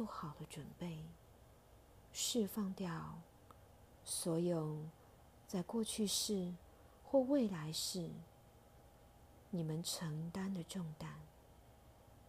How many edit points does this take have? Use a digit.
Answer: 1